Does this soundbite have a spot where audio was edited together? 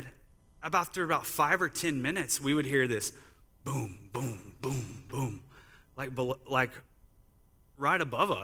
no; 0 cuts

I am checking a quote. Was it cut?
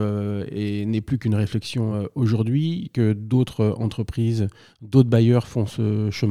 no; 0 cuts

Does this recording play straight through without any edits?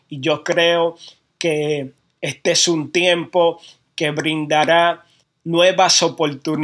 yes; 0 cuts

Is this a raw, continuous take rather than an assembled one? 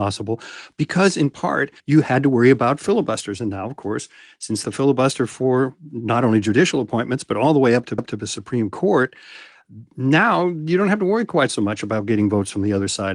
no; 3 cuts; at 1.8 s, 4.6 s, 8.0 s

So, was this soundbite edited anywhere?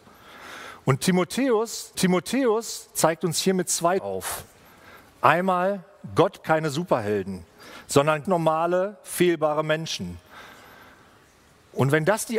yes; 4 cuts; at 1.9 s, 4.0 s, 6.4 s, 8.2 s

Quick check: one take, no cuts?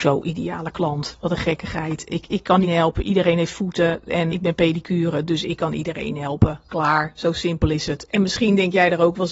no; 2 cuts; at 2.6 s, 4.3 s

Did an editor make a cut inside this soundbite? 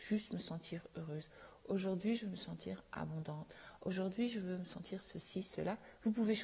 no; 0 cuts

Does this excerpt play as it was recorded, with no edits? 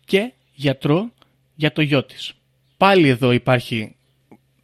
yes; 0 cuts

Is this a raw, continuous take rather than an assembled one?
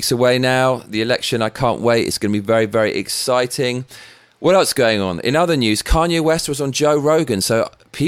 yes; 0 cuts

